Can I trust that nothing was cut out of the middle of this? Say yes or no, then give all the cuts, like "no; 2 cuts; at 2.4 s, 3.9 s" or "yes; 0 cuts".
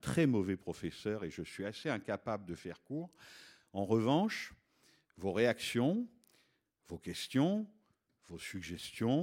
yes; 0 cuts